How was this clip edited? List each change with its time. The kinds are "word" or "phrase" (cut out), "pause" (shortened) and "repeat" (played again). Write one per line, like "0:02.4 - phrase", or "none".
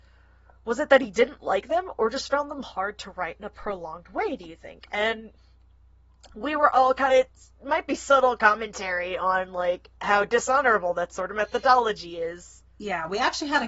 0:07.1 - phrase
0:10.0 - pause